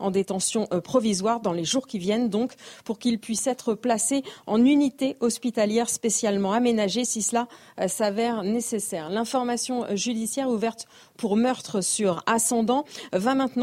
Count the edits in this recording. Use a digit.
0